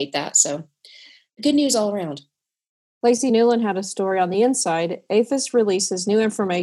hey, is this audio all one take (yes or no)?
yes